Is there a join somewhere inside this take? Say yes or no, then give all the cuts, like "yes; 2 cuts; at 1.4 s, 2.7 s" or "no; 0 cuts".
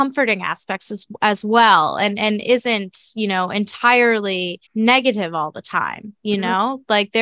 yes; 1 cut; at 4.7 s